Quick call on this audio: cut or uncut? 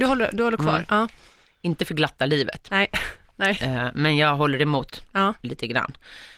uncut